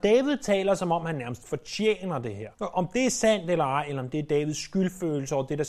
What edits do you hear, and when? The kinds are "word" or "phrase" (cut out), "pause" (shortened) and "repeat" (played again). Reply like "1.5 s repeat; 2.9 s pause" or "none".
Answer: 2.5 s pause